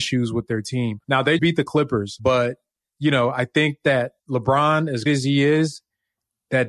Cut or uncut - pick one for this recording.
cut